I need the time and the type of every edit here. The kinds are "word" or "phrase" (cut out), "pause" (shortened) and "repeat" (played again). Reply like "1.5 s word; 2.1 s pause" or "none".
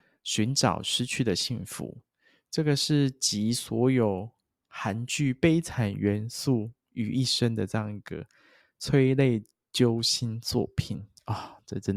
none